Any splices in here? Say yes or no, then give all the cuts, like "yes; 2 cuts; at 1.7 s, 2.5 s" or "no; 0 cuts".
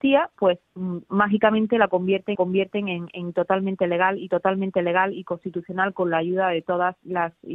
yes; 2 cuts; at 2.3 s, 4.3 s